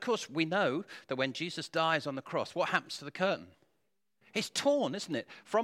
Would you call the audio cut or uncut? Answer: uncut